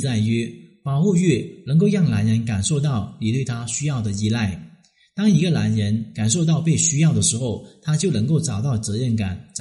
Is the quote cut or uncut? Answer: uncut